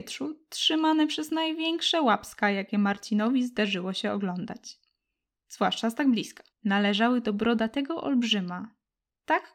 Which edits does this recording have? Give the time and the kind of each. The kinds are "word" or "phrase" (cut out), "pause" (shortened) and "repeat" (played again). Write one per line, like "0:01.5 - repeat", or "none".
0:06.5 - pause